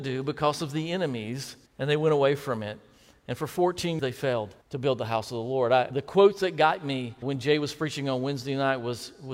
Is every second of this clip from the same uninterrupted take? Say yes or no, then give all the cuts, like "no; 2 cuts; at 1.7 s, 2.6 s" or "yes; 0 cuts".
no; 5 cuts; at 1.7 s, 4.0 s, 4.6 s, 5.9 s, 7.2 s